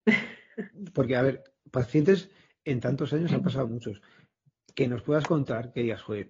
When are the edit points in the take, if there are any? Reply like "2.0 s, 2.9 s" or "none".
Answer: none